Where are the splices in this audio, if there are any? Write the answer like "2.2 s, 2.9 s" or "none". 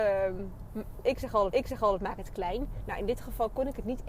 1.5 s